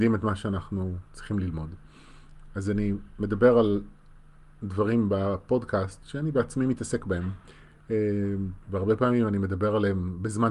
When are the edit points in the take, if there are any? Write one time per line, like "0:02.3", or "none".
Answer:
none